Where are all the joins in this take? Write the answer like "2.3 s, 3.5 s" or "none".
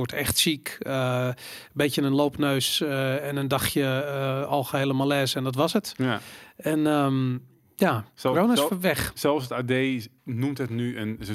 8.1 s